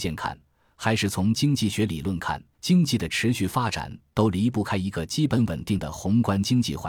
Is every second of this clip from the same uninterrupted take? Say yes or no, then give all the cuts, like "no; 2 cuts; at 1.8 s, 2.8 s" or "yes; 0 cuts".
no; 1 cut; at 2.5 s